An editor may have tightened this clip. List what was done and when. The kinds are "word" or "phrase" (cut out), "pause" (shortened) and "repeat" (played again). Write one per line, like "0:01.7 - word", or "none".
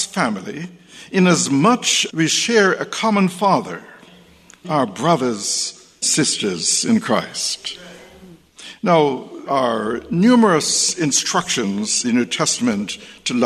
0:02.1 - word
0:04.6 - word
0:06.0 - word
0:09.5 - word
0:12.0 - word

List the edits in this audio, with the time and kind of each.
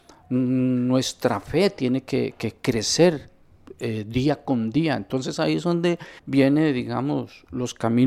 0:06.2 - pause

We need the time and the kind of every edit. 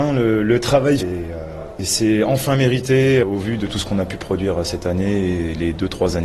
0:01.0 - phrase
0:03.2 - word

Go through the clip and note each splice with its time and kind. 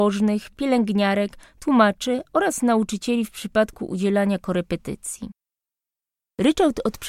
none

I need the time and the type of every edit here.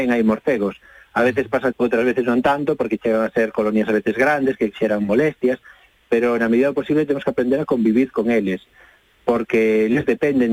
0:01.7 - word

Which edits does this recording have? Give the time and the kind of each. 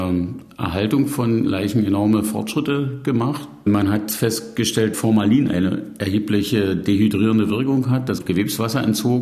0:04.9 - word
0:08.2 - word

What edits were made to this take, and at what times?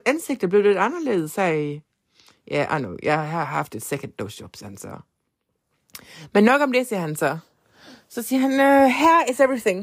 none

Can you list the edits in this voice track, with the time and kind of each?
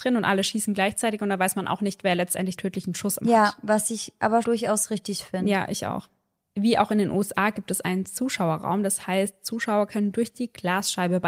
0:02.6 - word
0:03.2 - word
0:04.4 - word

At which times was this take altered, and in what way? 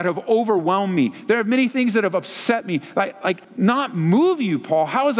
0:03.4 - pause

